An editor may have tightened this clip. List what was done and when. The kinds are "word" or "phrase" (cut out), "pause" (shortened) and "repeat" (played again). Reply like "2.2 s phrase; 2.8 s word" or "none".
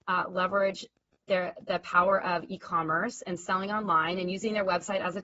none